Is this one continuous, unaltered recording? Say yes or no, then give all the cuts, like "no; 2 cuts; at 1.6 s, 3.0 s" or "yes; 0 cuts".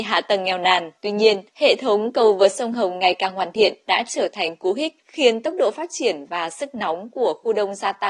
no; 3 cuts; at 1.0 s, 1.5 s, 5.0 s